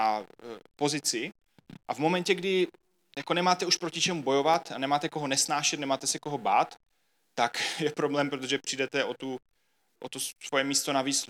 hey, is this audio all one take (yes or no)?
yes